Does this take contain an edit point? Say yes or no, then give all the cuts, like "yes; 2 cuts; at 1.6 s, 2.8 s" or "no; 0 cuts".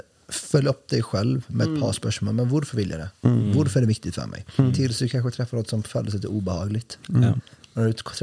no; 0 cuts